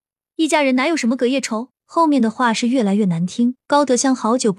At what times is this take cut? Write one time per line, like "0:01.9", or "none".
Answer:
0:01.8
0:03.6